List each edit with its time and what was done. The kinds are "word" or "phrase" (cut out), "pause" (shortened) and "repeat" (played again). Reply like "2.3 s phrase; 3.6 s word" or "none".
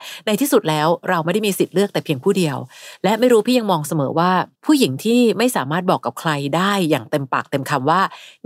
4.5 s pause